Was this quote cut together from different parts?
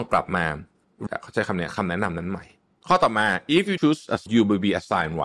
yes; 3 cuts; at 1.1 s, 3.8 s, 4.3 s

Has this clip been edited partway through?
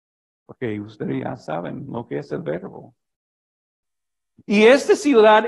no; 0 cuts

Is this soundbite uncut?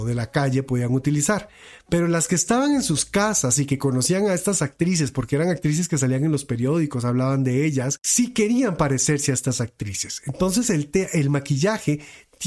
yes; 0 cuts

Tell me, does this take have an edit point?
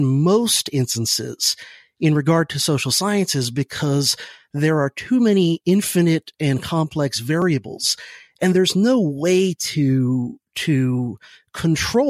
no; 0 cuts

